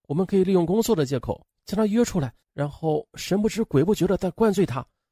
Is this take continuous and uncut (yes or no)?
no